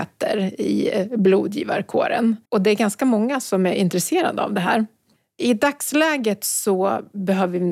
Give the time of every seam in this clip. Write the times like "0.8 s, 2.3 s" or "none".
2.4 s